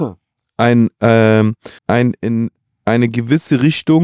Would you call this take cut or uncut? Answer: cut